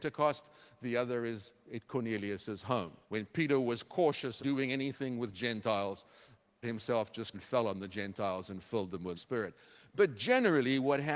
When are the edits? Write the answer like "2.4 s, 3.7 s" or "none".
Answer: 3.0 s, 4.4 s, 6.6 s, 7.3 s, 9.2 s